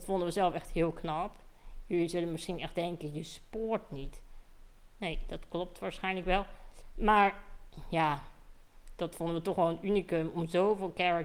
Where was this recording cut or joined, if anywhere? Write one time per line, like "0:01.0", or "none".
0:04.9